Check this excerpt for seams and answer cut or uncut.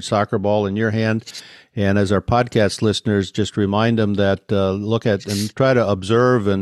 uncut